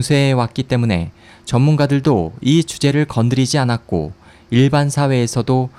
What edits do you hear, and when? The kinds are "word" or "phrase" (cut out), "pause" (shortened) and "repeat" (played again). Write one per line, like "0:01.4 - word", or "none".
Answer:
none